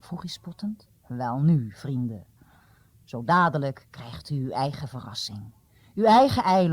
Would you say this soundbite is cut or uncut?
cut